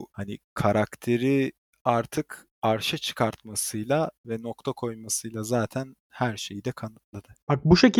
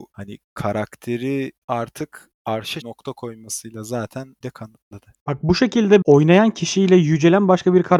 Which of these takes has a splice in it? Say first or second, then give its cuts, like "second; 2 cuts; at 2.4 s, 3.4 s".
second; 4 cuts; at 1.6 s, 2.8 s, 4.4 s, 6.0 s